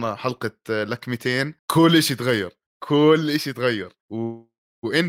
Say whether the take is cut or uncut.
cut